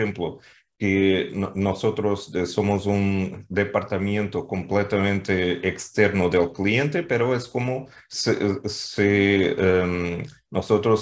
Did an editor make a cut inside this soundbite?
no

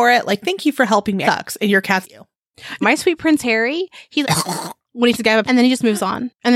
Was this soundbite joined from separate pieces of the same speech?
yes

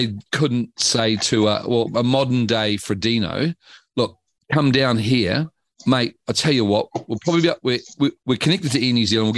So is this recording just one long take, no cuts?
yes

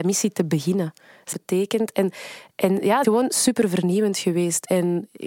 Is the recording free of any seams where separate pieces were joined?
no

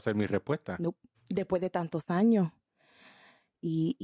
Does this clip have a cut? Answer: yes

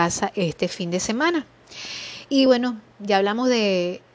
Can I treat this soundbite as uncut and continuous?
yes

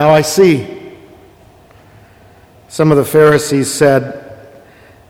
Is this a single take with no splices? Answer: yes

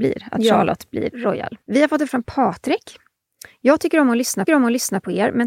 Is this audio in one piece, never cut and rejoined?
no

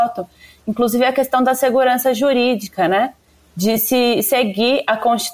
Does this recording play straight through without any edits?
yes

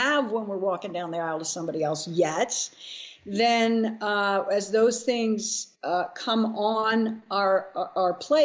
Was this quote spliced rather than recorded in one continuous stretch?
yes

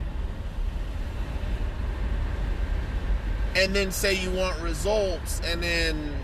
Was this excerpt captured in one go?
yes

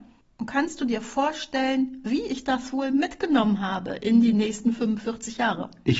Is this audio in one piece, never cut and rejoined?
yes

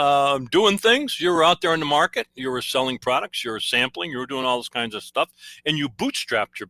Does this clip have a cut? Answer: no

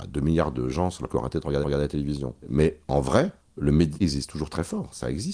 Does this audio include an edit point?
yes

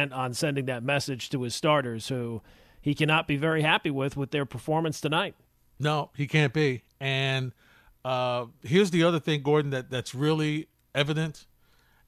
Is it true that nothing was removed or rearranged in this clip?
yes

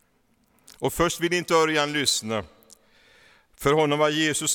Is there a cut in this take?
no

